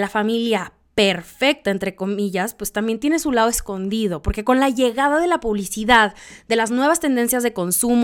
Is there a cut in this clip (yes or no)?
no